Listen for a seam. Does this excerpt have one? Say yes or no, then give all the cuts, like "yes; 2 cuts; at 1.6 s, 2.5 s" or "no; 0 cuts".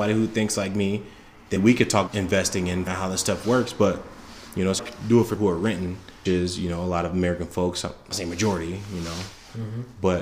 yes; 7 cuts; at 1.6 s, 2.1 s, 2.9 s, 4.8 s, 5.4 s, 6.3 s, 8.1 s